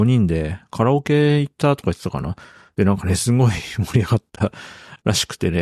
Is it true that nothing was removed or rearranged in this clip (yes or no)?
yes